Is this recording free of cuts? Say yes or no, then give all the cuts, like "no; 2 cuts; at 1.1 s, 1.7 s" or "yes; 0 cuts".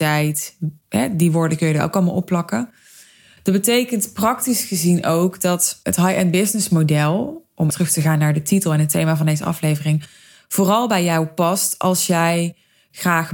no; 1 cut; at 7.7 s